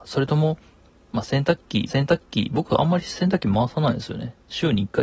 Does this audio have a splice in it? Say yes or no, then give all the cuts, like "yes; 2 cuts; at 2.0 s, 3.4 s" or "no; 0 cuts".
yes; 1 cut; at 1.9 s